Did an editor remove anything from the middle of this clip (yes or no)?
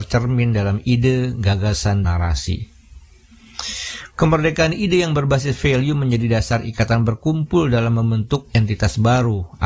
yes